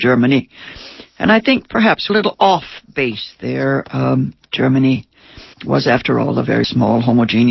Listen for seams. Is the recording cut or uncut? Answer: cut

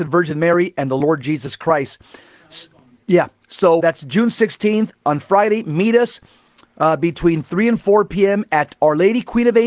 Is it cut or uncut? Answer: cut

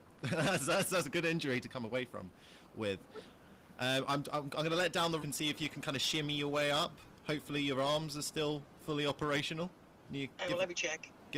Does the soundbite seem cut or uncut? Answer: cut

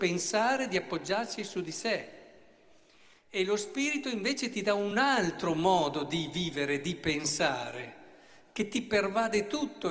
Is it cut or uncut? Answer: uncut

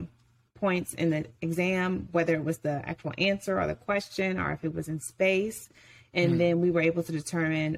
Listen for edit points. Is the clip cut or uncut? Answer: uncut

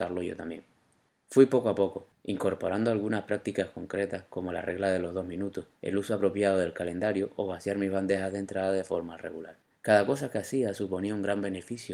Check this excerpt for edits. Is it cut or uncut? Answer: cut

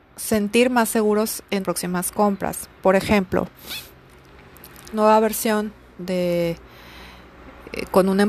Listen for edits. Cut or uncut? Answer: cut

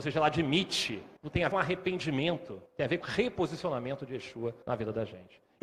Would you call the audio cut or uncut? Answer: cut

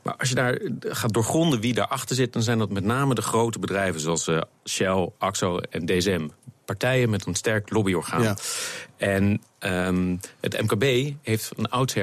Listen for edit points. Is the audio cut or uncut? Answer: uncut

